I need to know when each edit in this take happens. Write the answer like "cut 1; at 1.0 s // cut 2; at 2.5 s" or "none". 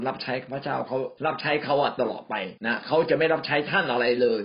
cut 1; at 1.2 s // cut 2; at 2.6 s